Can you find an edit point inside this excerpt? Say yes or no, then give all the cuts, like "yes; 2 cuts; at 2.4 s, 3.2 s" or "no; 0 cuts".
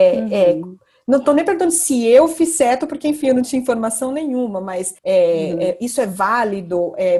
yes; 1 cut; at 5.0 s